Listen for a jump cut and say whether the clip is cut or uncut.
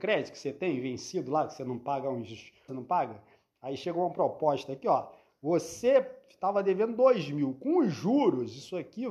cut